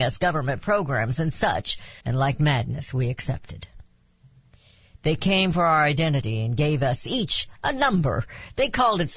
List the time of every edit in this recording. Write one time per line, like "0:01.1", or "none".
0:02.0